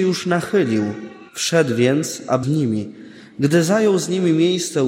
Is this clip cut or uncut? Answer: cut